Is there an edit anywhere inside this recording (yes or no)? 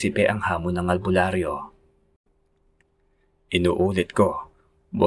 no